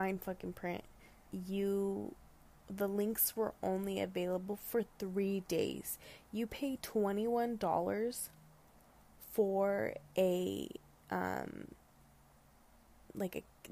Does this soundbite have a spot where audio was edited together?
yes; 1 cut; at 1.3 s

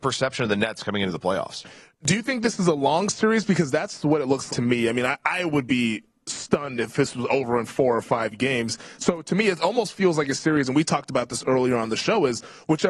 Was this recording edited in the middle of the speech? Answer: yes; 1 cut; at 4.5 s

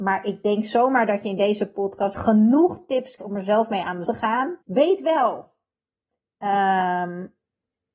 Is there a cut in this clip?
yes; 4 cuts; at 2.1 s, 3.2 s, 4.1 s, 4.6 s

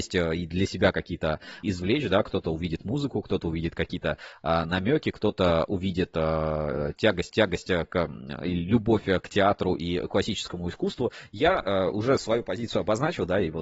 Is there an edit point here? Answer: yes; 2 cuts; at 1.6 s, 7.3 s

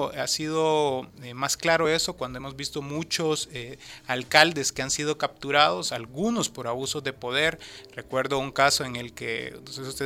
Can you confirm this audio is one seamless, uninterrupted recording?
yes; 0 cuts

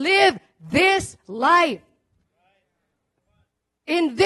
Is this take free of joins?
yes; 0 cuts

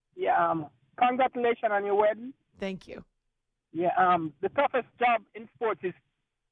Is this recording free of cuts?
yes; 0 cuts

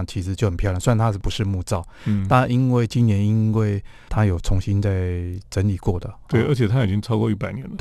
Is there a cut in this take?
no; 0 cuts

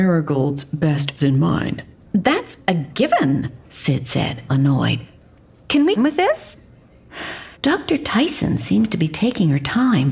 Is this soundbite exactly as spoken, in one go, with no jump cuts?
no; 6 cuts; at 1.1 s, 1.9 s, 3.6 s, 4.5 s, 6.0 s, 7.5 s

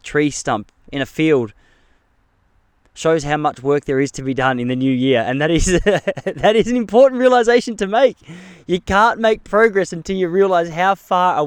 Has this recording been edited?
no; 0 cuts

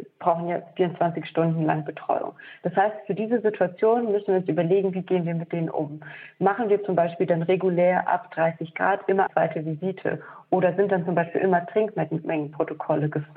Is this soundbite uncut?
no; 1 cut; at 9.3 s

